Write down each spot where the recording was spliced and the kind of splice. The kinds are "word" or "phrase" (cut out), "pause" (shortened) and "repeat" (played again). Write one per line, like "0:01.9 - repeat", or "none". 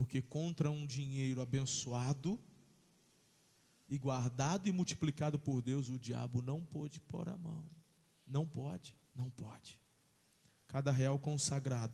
0:09.0 - pause